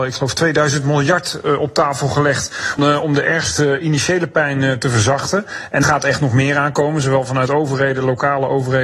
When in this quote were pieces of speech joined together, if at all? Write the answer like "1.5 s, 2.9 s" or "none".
2.8 s, 5.8 s